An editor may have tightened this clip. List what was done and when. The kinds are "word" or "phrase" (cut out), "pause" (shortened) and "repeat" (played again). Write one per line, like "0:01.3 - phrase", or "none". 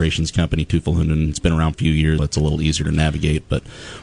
0:01.7 - phrase
0:02.2 - word